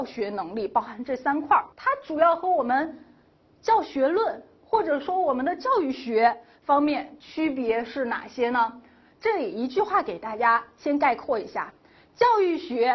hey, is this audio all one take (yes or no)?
no